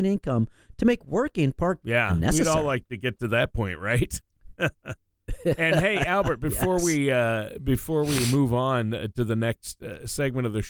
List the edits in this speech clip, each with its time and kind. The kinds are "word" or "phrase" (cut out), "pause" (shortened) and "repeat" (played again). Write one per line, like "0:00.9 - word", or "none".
0:01.8 - word

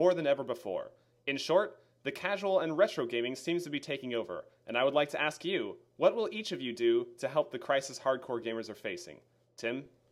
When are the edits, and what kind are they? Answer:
none

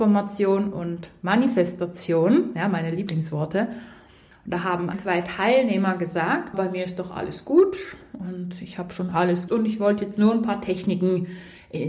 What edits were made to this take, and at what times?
0:04.9 - word
0:06.5 - word
0:09.5 - word

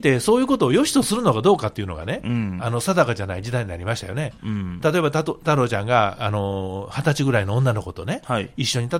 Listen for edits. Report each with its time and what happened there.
0:04.4 - pause

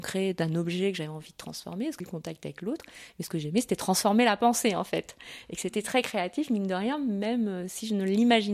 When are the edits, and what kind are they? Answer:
0:02.0 - word

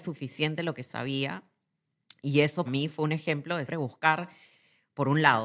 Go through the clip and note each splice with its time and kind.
0:02.6 - word
0:03.7 - word

